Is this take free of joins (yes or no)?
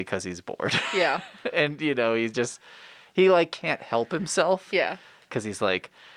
yes